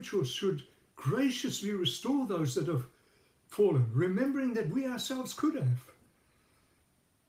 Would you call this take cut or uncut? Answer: uncut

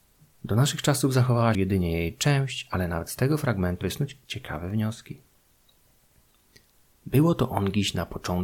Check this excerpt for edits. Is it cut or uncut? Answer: cut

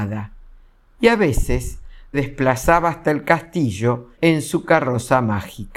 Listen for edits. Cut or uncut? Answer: cut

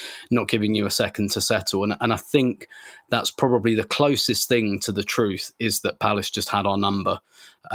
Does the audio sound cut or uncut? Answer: uncut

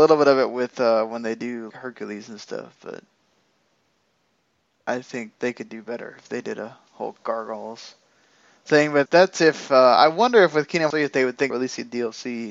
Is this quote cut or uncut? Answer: cut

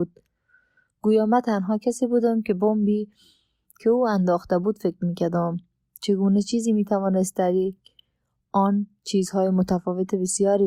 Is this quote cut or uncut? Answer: uncut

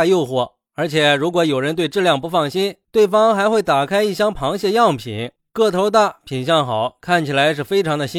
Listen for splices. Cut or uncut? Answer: uncut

